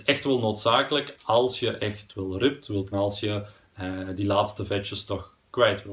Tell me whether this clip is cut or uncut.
cut